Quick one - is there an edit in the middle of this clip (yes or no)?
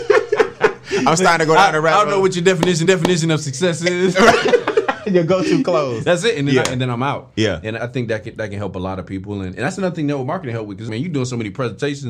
yes